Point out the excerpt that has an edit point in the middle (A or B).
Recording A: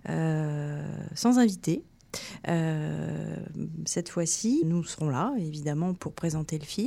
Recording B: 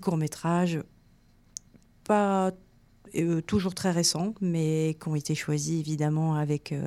A